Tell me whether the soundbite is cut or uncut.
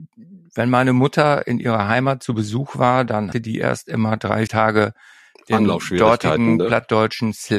cut